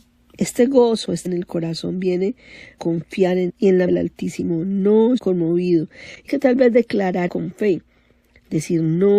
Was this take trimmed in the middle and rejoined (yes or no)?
yes